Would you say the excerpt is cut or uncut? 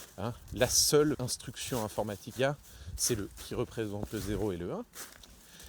cut